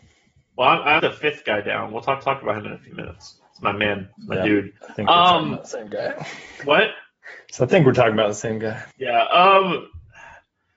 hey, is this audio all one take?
no; 5 cuts; at 1.0 s, 2.2 s, 4.1 s, 4.8 s, 8.9 s

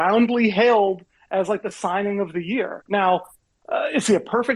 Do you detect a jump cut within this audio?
no; 0 cuts

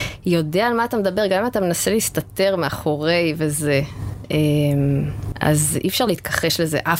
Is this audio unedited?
yes; 0 cuts

